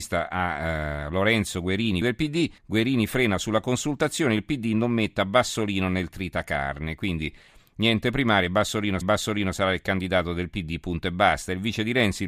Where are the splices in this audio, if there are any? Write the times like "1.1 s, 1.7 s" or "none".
2.0 s, 2.6 s, 9.0 s